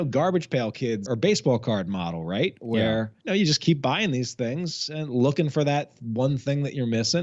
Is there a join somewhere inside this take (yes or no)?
yes